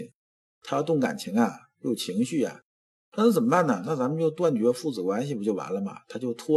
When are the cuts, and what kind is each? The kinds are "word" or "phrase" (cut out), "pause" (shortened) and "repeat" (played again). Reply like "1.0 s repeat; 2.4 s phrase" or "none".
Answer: none